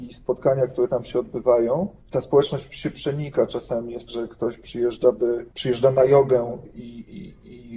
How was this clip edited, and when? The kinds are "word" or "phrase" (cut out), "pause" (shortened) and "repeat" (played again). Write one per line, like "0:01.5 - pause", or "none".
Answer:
0:02.0 - pause
0:04.1 - word
0:05.5 - pause